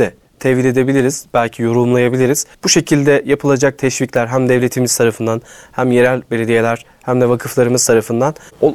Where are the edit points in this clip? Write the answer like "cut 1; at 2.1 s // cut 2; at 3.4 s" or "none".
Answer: cut 1; at 2.5 s